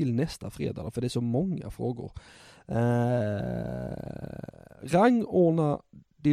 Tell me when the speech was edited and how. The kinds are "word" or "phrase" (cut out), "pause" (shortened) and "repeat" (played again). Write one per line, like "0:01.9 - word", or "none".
none